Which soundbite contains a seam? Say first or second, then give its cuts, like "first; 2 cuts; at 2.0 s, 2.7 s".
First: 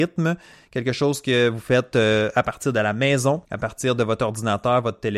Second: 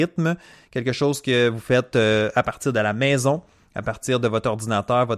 first; 1 cut; at 3.4 s